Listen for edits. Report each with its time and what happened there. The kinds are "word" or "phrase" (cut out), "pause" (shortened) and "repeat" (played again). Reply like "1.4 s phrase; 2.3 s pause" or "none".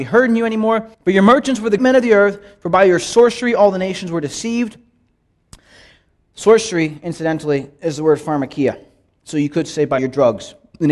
0.9 s pause; 1.8 s word; 10.0 s word